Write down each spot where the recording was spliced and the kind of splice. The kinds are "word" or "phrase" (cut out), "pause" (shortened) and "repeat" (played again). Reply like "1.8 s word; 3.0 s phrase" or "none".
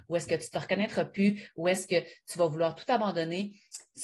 none